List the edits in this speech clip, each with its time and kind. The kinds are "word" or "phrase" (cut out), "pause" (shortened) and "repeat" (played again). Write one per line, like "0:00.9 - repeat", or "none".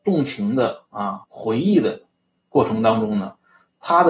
0:01.2 - pause